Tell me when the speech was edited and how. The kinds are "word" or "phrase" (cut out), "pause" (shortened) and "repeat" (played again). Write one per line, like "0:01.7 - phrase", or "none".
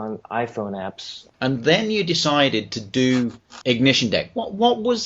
0:01.3 - pause
0:03.6 - word